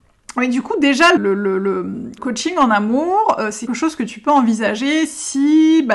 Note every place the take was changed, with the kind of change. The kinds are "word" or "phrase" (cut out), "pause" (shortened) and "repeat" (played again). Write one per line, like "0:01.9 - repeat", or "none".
0:01.2 - word
0:02.2 - word
0:03.7 - word